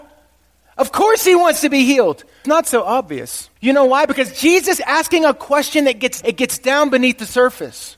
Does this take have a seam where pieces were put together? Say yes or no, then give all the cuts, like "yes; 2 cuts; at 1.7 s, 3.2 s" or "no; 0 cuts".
yes; 4 cuts; at 2.4 s, 3.6 s, 4.8 s, 6.2 s